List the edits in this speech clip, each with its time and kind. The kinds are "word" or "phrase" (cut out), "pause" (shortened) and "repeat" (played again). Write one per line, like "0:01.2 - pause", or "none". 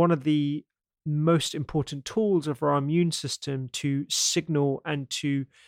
none